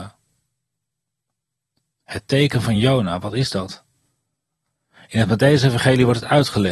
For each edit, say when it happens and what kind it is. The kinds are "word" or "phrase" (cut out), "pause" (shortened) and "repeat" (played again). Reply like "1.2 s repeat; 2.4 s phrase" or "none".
none